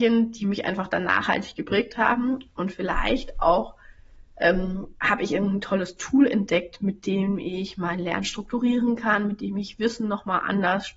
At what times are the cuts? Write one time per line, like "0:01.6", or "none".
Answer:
none